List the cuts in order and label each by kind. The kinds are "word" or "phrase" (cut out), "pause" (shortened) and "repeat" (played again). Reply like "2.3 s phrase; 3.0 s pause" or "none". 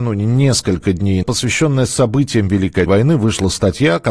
1.2 s word; 2.9 s word